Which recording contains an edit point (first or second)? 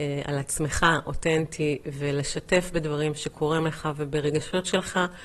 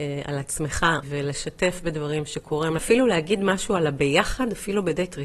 second